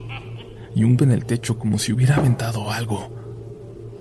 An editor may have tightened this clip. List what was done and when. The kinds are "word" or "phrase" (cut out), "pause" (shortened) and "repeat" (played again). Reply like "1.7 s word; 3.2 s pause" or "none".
1.0 s word